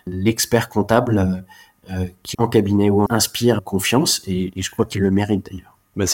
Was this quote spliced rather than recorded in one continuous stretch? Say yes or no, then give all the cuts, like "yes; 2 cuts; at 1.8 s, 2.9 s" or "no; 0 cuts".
yes; 3 cuts; at 2.3 s, 3.1 s, 3.6 s